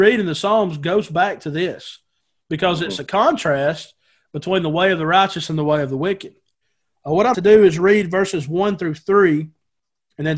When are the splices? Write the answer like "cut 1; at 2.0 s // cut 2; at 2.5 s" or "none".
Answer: cut 1; at 7.3 s

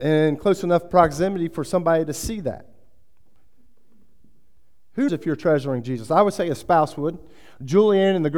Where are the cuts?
cut 1; at 5.1 s

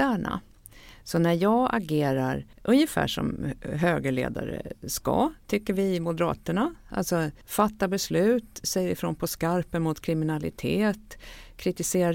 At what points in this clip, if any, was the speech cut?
cut 1; at 2.5 s // cut 2; at 7.4 s

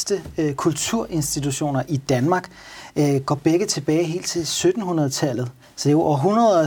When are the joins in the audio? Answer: cut 1; at 5.6 s

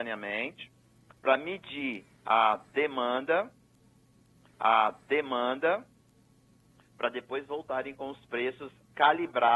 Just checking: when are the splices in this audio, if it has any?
cut 1; at 4.5 s

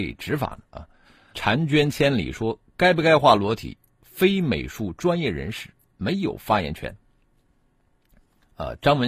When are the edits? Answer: cut 1; at 1.3 s

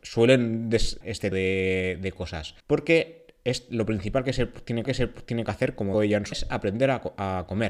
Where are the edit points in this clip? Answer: cut 1; at 1.0 s // cut 2; at 1.3 s // cut 3; at 2.6 s // cut 4; at 4.8 s // cut 5; at 5.9 s // cut 6; at 6.3 s

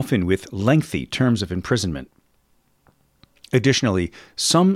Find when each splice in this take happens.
none

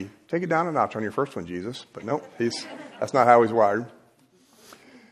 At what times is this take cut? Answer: none

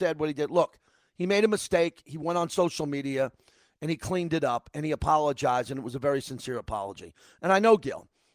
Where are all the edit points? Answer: none

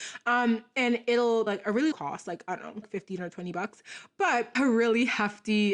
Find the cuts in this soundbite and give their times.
cut 1; at 1.5 s // cut 2; at 1.9 s // cut 3; at 2.8 s // cut 4; at 4.5 s

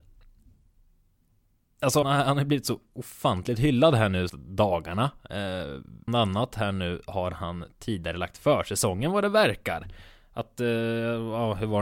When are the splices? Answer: cut 1; at 2.0 s // cut 2; at 4.3 s // cut 3; at 6.1 s

